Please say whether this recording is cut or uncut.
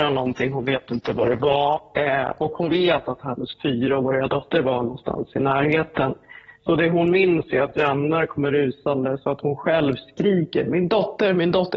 uncut